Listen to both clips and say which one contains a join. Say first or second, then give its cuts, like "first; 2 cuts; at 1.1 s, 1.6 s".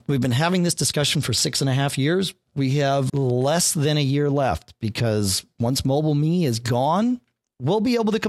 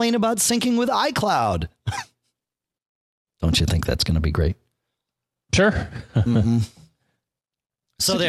first; 1 cut; at 3.1 s